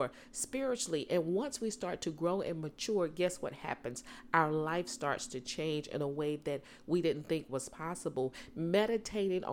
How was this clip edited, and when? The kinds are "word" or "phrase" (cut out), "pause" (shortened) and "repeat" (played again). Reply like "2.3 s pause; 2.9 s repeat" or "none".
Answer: none